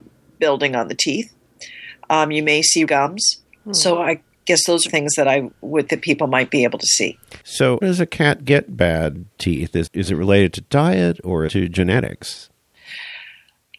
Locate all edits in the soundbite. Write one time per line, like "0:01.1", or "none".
0:02.9
0:04.9
0:05.9
0:07.8
0:09.3
0:09.9
0:11.5